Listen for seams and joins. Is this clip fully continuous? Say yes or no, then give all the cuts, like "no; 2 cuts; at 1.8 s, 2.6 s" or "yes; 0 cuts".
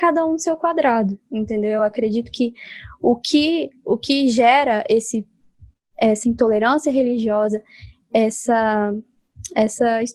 yes; 0 cuts